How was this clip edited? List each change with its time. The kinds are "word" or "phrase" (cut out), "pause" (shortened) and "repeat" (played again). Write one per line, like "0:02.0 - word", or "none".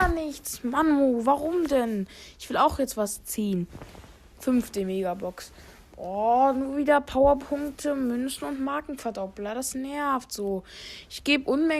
none